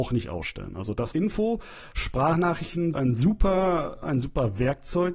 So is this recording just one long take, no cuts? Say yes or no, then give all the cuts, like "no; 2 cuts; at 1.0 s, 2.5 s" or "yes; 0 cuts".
no; 3 cuts; at 1.1 s, 2.9 s, 4.0 s